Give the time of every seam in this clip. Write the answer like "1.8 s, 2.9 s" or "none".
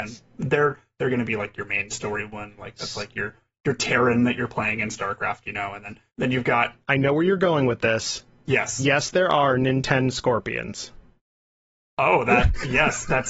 6.1 s

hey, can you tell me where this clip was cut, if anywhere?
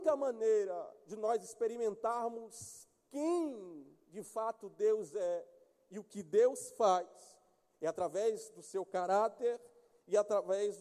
none

